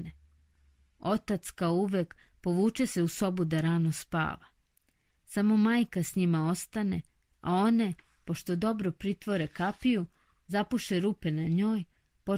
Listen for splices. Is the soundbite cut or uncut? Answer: uncut